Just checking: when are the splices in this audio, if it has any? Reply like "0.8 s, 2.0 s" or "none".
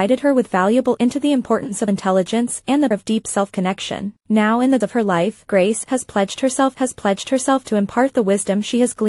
1.0 s, 1.9 s, 2.9 s, 4.2 s, 4.8 s, 5.5 s, 6.7 s